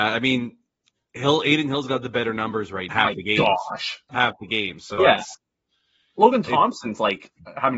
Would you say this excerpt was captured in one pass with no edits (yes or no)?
no